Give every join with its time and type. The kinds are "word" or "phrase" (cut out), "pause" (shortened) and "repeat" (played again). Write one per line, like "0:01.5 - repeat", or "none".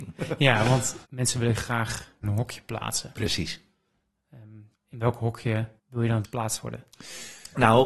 0:01.0 - pause
0:02.2 - phrase
0:04.7 - word
0:05.8 - pause
0:06.2 - word